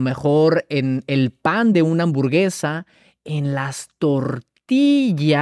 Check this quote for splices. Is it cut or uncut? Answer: uncut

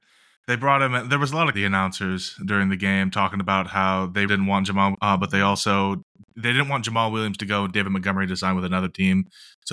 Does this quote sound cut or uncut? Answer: cut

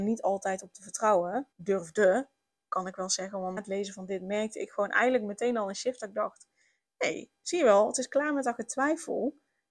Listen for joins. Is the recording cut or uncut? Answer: cut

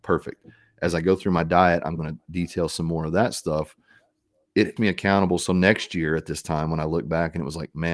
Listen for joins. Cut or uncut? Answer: cut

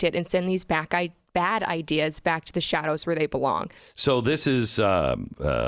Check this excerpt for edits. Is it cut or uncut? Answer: cut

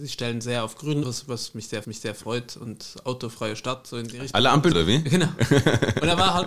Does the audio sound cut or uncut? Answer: cut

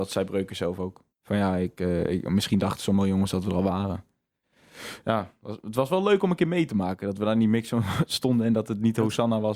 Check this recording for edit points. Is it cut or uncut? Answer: cut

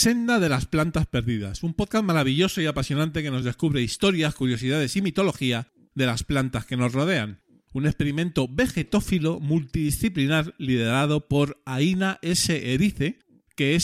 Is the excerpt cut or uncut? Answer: uncut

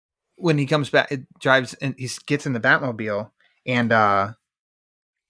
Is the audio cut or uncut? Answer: uncut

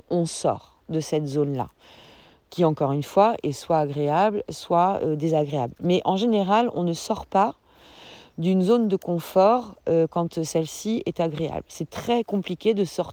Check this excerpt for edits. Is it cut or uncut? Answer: uncut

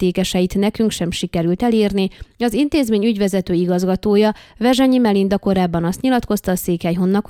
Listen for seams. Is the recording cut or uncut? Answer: uncut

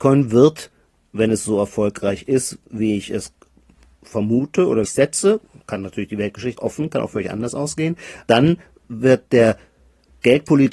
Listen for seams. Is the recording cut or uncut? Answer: cut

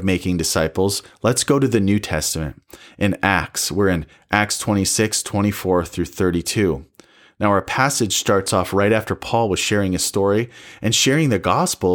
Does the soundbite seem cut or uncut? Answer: uncut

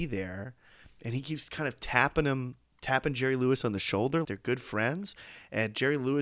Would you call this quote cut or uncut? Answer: cut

